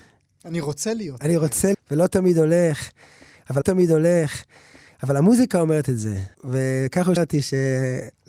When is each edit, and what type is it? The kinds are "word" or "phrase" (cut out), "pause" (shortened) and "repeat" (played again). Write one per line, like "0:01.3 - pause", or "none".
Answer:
0:01.7 - word
0:03.6 - repeat
0:06.3 - pause
0:07.2 - word